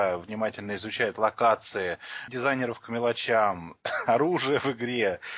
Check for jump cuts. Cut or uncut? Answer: cut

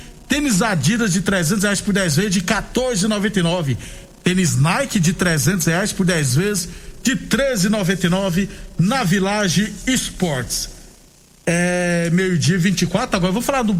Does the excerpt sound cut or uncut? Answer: uncut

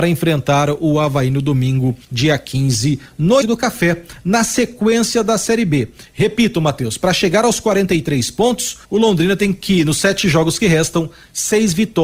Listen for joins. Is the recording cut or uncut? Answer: cut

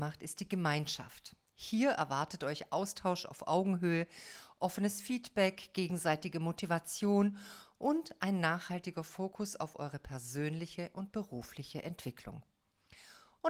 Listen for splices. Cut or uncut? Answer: uncut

